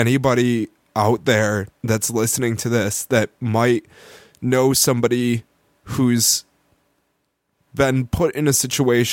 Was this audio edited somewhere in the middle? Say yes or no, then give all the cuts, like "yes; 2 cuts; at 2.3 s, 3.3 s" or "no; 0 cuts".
yes; 1 cut; at 1.7 s